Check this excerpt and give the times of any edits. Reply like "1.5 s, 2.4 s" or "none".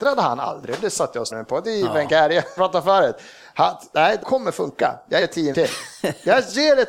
1.3 s, 2.6 s, 4.2 s, 5.2 s, 5.5 s